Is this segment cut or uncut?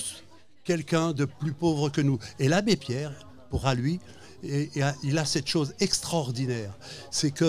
cut